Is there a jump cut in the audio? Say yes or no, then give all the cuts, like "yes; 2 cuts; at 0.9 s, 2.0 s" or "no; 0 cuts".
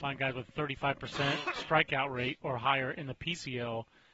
no; 0 cuts